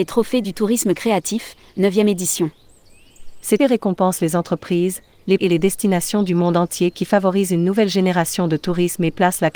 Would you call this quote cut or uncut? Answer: cut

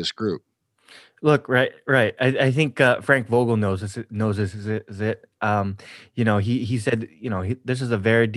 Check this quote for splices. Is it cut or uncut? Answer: uncut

